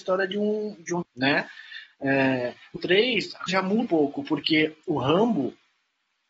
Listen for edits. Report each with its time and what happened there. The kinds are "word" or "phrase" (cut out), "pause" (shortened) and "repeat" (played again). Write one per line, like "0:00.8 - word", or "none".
0:01.0 - word
0:02.8 - word
0:03.5 - word
0:03.9 - word